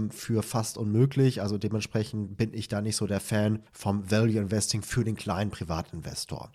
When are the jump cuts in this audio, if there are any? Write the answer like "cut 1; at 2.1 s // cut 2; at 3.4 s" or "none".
cut 1; at 3.7 s